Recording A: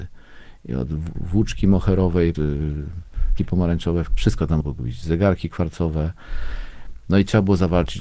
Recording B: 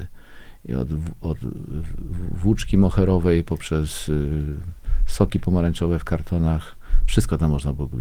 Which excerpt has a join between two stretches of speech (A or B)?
A